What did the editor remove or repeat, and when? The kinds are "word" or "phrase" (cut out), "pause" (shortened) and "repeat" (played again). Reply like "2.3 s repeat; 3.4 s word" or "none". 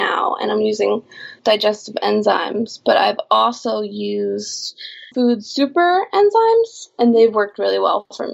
1.4 s phrase; 5.1 s word